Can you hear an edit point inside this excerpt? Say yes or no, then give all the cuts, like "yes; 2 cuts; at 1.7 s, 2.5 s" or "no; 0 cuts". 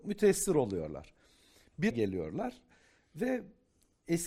yes; 1 cut; at 1.9 s